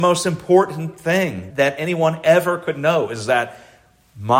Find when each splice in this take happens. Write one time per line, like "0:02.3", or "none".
0:01.5